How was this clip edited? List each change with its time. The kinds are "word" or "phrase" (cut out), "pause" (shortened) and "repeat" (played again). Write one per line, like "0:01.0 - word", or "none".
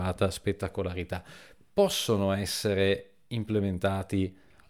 none

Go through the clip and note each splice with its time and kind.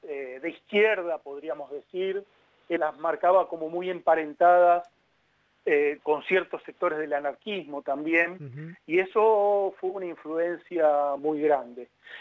0:02.8 - word
0:06.0 - word
0:11.2 - word

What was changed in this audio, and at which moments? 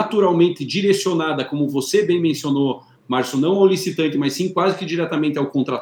none

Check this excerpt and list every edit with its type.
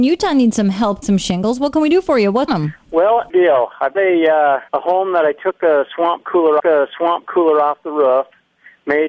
0:01.0 - word
0:02.5 - word
0:03.3 - phrase
0:03.9 - word
0:04.7 - pause
0:06.6 - repeat

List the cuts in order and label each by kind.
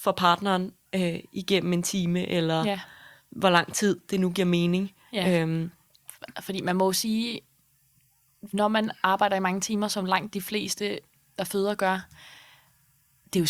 none

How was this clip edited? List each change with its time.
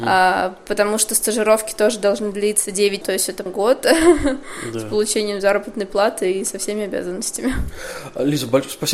0:03.0 - word
0:03.5 - word

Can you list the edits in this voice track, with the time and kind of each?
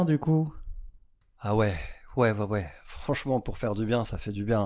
none

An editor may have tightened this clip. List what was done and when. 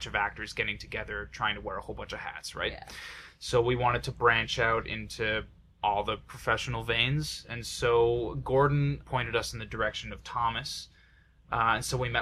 none

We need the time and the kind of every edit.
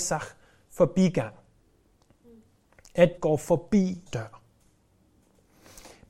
0:03.2 - word
0:04.1 - word

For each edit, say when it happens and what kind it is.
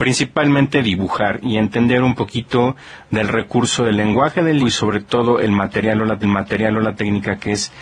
0:04.6 - word
0:06.2 - repeat

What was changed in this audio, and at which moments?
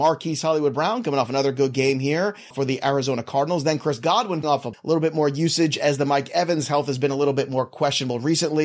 0:02.5 - word
0:04.4 - word
0:04.7 - word

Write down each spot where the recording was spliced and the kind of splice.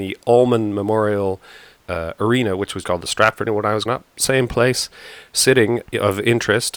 0:01.8 - word
0:02.8 - word
0:03.5 - word
0:03.9 - word
0:05.9 - word

